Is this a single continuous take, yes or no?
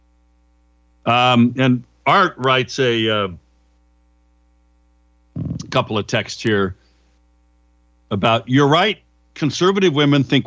yes